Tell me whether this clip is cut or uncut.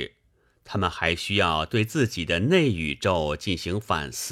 uncut